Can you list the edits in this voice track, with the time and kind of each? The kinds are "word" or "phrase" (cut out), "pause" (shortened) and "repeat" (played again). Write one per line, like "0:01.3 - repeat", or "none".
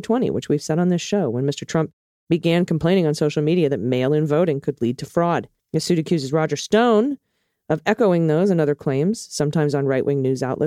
0:05.6 - pause

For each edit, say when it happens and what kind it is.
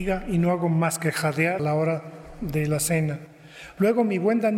0:01.6 - word

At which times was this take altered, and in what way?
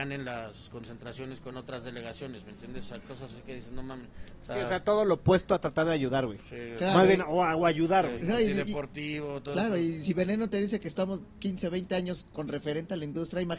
none

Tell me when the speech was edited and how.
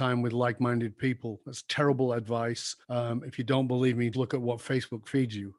0:02.8 - pause
0:04.1 - word

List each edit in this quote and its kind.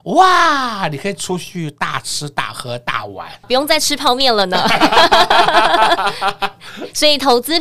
0:03.4 - phrase

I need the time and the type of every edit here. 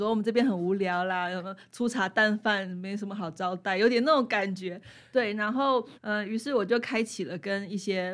0:06.0 - pause

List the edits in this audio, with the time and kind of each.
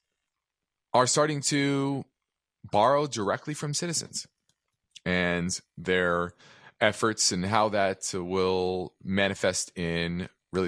none

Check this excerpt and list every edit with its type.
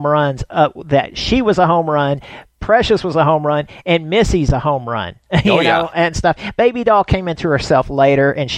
none

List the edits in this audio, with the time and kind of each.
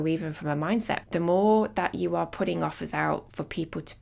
0:01.0 - word

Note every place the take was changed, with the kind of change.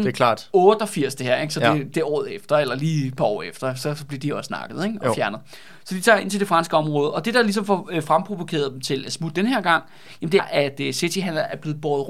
0:10.4 - word

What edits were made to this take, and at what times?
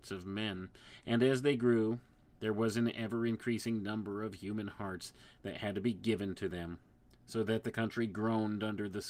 none

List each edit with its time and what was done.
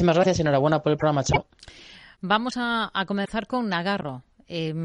none

